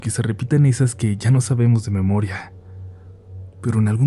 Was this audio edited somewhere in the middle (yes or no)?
no